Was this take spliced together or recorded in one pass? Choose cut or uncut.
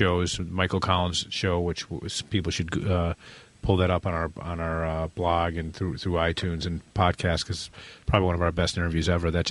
uncut